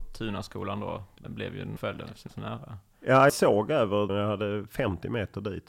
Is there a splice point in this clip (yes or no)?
yes